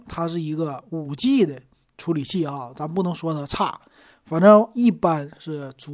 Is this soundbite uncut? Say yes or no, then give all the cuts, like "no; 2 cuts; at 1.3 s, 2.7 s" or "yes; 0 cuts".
yes; 0 cuts